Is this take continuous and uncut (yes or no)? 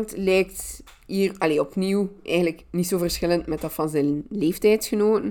yes